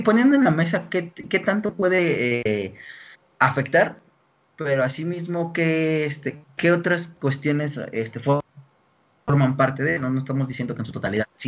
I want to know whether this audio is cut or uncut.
cut